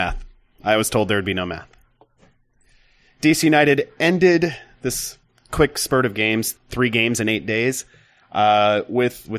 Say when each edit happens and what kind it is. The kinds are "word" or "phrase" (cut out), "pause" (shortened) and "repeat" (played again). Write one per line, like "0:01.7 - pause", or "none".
0:06.5 - word